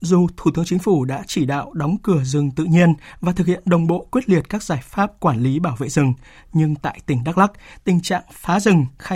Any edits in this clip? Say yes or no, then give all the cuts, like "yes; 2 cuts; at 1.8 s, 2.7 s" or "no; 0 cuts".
no; 0 cuts